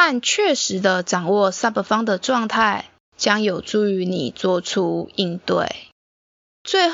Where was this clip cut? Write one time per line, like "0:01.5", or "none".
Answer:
none